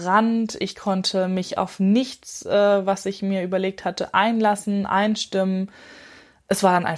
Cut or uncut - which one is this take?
uncut